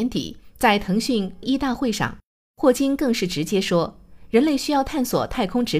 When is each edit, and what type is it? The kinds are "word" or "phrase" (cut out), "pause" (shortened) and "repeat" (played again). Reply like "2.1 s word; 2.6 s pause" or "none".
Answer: 1.4 s word

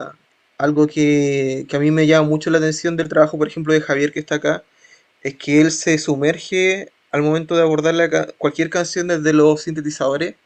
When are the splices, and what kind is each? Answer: none

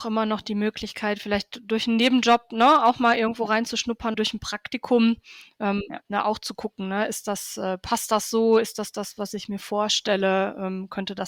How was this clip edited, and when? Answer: 4.1 s phrase

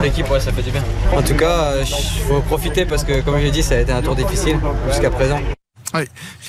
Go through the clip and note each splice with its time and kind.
none

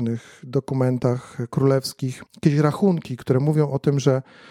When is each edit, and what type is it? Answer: 2.3 s pause

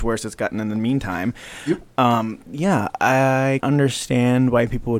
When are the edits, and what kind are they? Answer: 2.4 s word; 3.6 s word

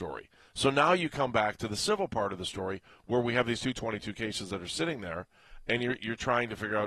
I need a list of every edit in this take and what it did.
none

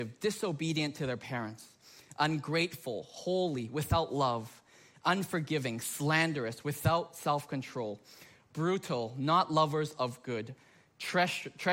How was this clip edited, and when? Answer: none

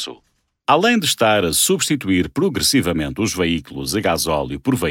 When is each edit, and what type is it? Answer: none

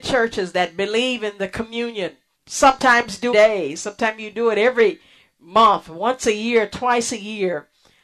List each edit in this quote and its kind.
2.3 s word; 3.3 s phrase

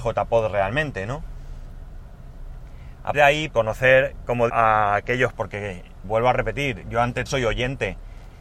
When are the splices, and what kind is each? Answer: 3.1 s word; 3.5 s word; 4.5 s word; 5.3 s word; 6.0 s word; 7.3 s word

